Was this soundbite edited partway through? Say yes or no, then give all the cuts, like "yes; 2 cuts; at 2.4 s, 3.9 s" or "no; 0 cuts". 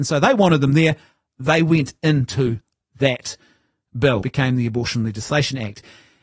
yes; 1 cut; at 4.2 s